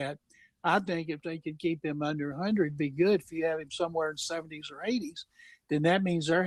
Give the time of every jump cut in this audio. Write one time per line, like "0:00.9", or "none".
none